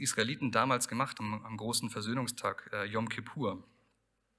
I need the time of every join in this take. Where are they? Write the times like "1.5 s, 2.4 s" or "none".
1.2 s